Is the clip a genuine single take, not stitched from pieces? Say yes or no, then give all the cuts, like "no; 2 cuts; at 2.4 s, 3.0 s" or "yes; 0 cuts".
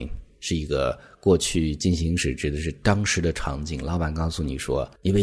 yes; 0 cuts